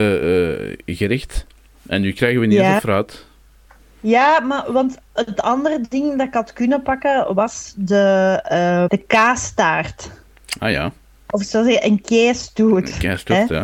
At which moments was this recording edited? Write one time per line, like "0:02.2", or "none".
0:08.9